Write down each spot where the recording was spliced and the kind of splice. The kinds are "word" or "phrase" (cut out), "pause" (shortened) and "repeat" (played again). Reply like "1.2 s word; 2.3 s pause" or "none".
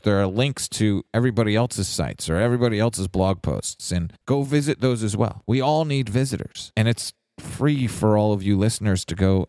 4.2 s pause

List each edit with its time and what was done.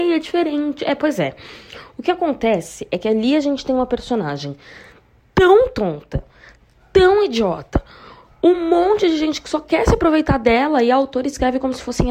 none

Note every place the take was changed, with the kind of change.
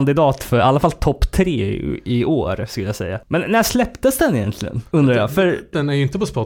none

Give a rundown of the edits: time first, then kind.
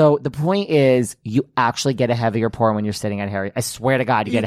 none

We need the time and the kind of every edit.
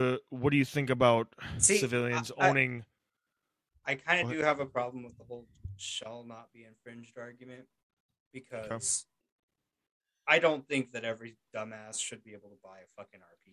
none

